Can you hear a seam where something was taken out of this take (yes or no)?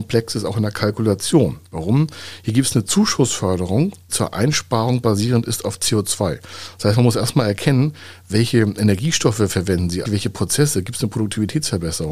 yes